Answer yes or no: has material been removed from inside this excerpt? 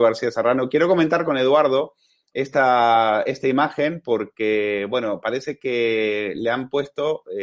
no